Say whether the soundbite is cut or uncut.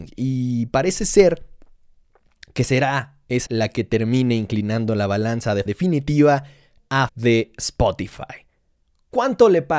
cut